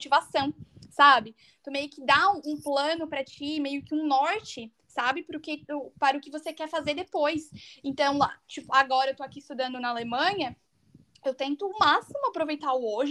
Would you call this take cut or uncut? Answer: uncut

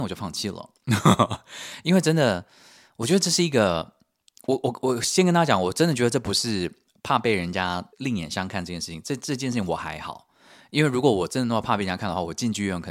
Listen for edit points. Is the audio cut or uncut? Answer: cut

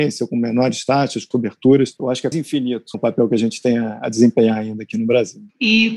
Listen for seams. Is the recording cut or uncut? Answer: cut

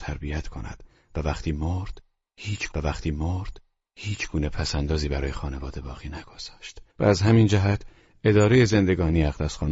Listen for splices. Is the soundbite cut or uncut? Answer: cut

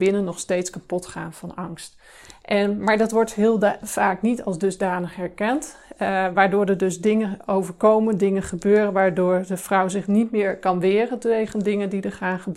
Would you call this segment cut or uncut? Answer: uncut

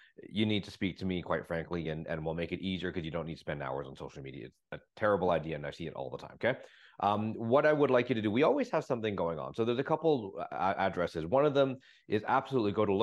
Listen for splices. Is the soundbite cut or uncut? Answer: uncut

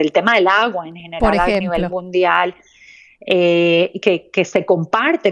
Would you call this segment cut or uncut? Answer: uncut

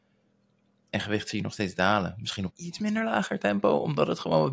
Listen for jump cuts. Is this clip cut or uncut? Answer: cut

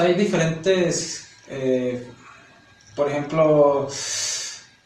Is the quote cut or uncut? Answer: uncut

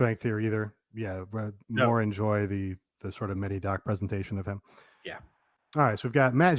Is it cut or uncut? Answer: uncut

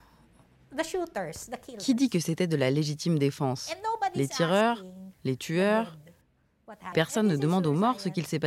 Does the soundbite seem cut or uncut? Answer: cut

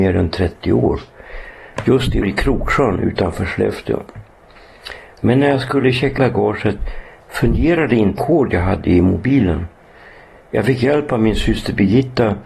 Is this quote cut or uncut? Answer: cut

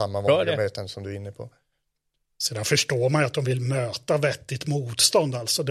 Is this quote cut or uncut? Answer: uncut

